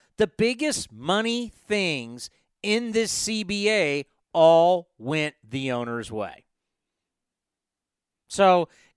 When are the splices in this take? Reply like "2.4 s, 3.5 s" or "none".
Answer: none